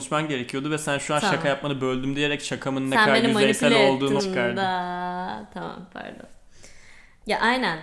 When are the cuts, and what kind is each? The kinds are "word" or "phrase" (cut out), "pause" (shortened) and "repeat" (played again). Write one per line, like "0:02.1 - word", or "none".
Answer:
0:04.2 - word

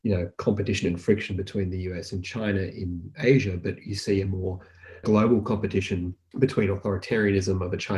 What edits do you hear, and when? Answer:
none

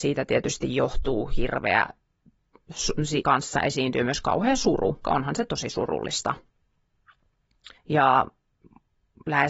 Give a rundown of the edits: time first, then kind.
0:03.2 - word
0:05.0 - word
0:07.8 - pause

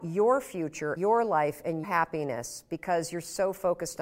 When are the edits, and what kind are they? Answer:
0:01.0 - word
0:01.8 - word

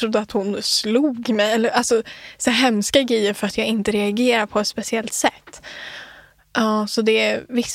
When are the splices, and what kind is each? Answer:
none

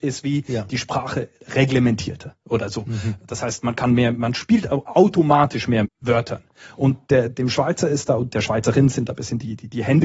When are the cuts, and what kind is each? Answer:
0:05.8 - word

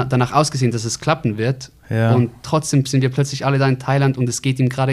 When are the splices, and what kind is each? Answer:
none

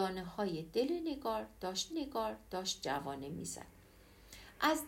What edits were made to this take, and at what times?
0:01.9 - repeat

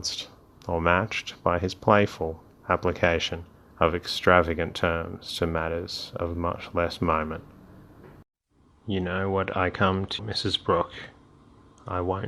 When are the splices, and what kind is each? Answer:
0:03.6 - pause
0:10.2 - phrase

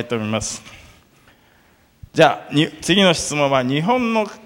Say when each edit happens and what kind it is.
0:02.1 - pause

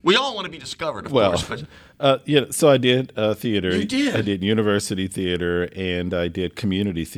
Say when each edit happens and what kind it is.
none

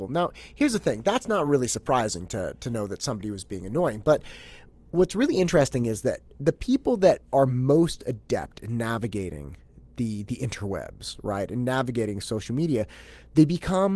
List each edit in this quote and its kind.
none

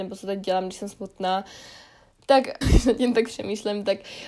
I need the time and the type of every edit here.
0:02.6 - word

